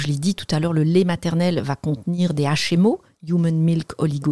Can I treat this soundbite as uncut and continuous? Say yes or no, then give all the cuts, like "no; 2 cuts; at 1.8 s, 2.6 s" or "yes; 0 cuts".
yes; 0 cuts